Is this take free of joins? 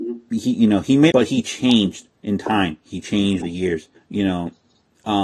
no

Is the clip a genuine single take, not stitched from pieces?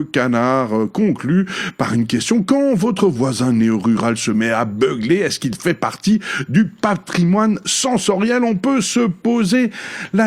yes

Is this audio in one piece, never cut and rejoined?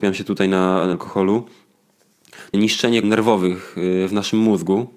no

